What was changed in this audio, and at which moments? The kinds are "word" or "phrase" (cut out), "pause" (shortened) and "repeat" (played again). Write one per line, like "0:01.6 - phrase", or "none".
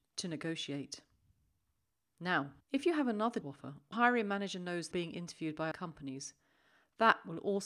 0:02.6 - pause
0:03.4 - word
0:03.9 - word
0:04.9 - word
0:05.7 - word